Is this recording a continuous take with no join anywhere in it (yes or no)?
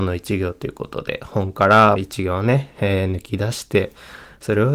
no